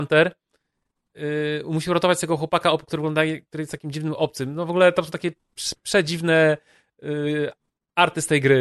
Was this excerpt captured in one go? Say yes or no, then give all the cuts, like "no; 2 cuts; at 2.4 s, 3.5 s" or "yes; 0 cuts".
yes; 0 cuts